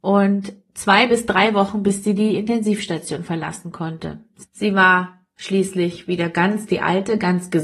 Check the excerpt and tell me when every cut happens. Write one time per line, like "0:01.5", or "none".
none